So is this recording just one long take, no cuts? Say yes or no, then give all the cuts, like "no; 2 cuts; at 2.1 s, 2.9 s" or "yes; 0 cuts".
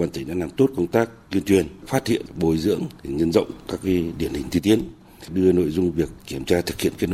yes; 0 cuts